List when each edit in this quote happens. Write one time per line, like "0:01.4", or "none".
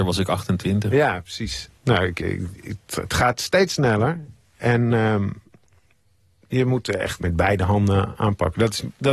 0:01.8
0:07.2